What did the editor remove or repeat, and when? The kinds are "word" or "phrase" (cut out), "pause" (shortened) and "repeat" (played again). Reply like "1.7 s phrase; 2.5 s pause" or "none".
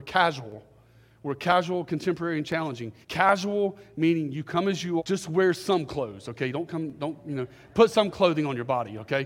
3.0 s pause; 5.0 s word